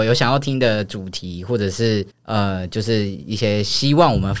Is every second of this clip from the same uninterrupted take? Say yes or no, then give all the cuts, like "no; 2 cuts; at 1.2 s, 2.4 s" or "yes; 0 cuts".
no; 1 cut; at 2.1 s